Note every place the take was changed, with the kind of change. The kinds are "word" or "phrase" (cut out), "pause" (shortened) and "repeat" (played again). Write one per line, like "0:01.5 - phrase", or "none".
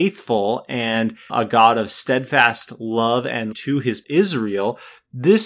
0:01.3 - word
0:03.5 - word
0:04.0 - word